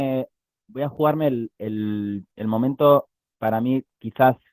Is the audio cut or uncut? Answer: cut